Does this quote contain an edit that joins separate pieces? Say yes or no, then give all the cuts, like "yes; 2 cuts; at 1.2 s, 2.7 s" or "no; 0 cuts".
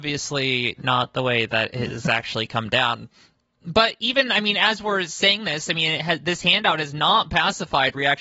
no; 0 cuts